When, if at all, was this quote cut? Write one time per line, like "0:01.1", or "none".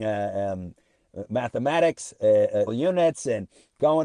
0:02.7